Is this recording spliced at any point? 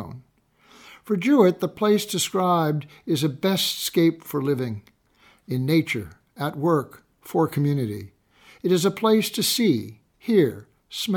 no; 0 cuts

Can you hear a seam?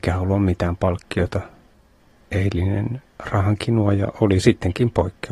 no; 0 cuts

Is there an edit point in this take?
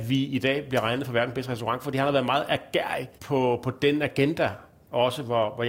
yes; 1 cut; at 3.1 s

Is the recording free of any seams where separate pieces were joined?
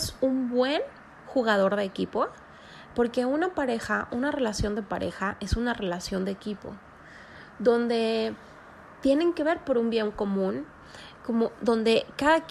yes; 0 cuts

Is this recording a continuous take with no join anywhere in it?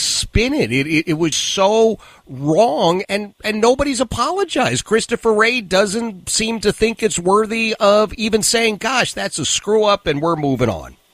no; 2 cuts; at 1.3 s, 3.0 s

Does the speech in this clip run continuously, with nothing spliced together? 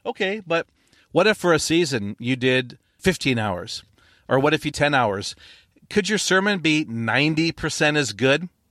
no; 2 cuts; at 3.0 s, 4.7 s

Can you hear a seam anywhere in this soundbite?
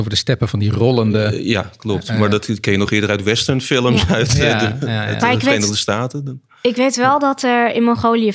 no; 0 cuts

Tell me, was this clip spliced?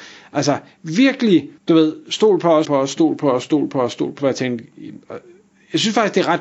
yes; 3 cuts; at 1.6 s, 2.6 s, 4.2 s

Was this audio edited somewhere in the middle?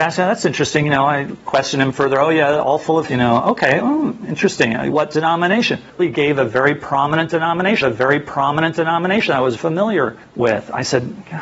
yes; 6 cuts; at 1.4 s, 3.1 s, 4.9 s, 6.0 s, 7.8 s, 9.6 s

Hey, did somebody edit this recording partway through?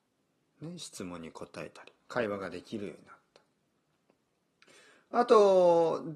yes; 1 cut; at 2.0 s

